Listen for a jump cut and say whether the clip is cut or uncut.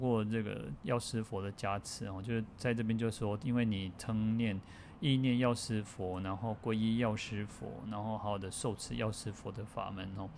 uncut